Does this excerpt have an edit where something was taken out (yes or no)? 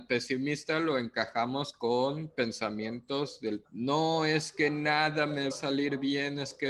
yes